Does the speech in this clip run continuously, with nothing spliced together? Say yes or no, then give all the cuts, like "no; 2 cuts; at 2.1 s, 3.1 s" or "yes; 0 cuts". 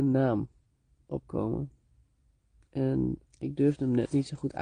no; 1 cut; at 3.3 s